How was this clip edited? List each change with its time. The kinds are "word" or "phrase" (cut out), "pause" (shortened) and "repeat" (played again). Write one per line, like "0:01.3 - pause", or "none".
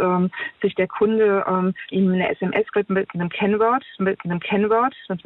0:01.9 - phrase
0:02.7 - word
0:04.0 - repeat